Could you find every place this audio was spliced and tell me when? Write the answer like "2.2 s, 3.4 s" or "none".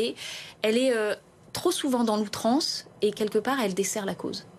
none